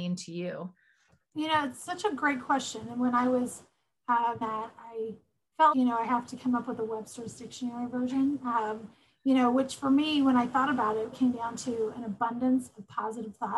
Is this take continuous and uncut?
no; 3 cuts; at 4.4 s, 5.7 s, 11.1 s

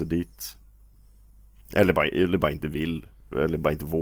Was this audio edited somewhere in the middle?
no; 0 cuts

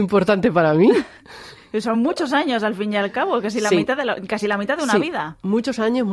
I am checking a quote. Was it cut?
no; 0 cuts

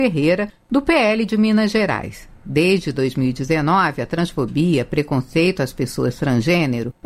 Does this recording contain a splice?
no; 0 cuts

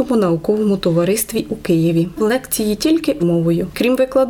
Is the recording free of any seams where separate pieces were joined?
no; 2 cuts; at 2.2 s, 3.2 s

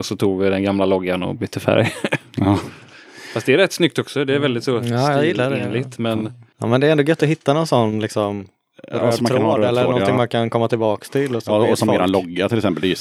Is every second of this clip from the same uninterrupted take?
yes; 0 cuts

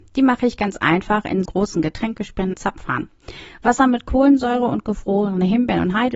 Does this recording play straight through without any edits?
no; 2 cuts; at 1.5 s, 2.5 s

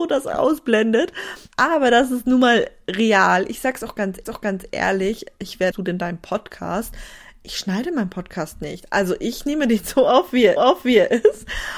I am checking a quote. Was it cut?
yes; 4 cuts; at 1.5 s, 4.3 s, 5.7 s, 10.6 s

